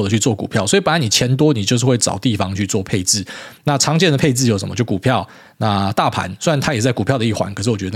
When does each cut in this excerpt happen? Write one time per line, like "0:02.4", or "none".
none